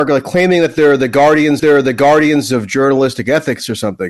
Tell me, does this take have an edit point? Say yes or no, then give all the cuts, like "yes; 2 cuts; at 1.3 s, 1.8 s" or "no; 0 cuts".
yes; 1 cut; at 1.6 s